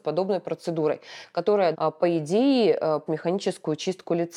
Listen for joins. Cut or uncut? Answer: cut